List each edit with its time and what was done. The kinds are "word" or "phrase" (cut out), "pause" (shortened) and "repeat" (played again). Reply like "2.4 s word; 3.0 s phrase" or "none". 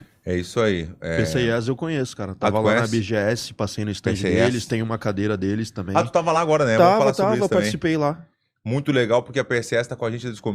none